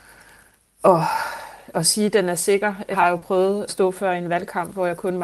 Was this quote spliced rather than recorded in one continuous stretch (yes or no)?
yes